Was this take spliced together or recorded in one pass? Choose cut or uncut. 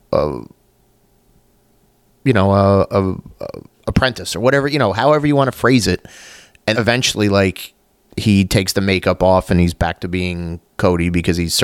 cut